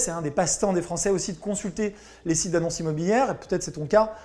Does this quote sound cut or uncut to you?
uncut